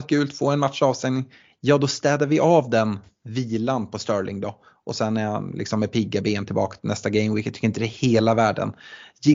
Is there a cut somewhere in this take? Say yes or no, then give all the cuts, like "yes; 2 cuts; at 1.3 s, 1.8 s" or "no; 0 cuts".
no; 0 cuts